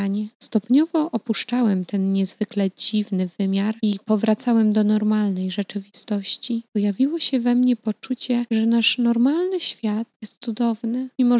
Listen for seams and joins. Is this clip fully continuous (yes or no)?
no